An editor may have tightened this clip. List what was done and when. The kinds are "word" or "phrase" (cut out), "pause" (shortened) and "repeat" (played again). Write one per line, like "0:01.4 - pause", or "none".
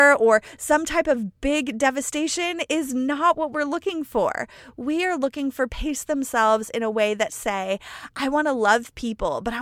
0:05.7 - phrase

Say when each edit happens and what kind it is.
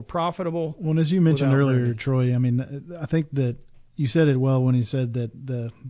0:03.9 - pause

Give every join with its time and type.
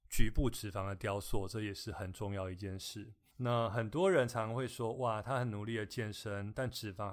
none

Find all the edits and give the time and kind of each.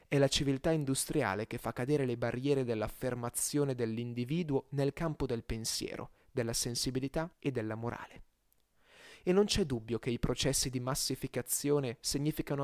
0:07.3 - pause

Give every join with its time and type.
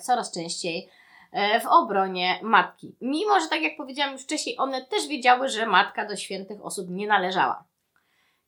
none

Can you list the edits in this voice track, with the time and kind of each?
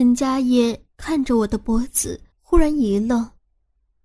0:02.3 - pause

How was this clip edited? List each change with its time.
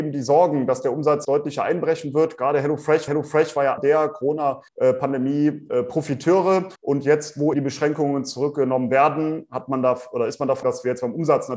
0:01.2 - word
0:03.1 - repeat
0:03.8 - word
0:04.7 - pause
0:06.8 - pause
0:07.5 - word
0:10.6 - word

